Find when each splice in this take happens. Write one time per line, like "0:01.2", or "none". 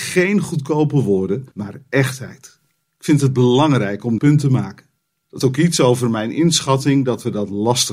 0:01.5
0:02.7
0:04.2
0:05.4